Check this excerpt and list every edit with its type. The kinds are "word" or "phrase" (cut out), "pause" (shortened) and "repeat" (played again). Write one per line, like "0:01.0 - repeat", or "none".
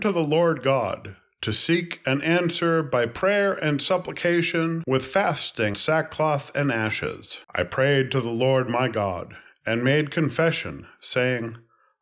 0:05.7 - word
0:07.4 - pause